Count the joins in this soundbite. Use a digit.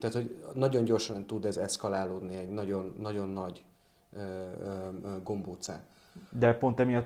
0